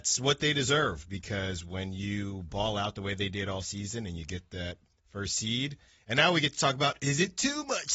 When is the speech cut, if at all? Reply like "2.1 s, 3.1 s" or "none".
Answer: none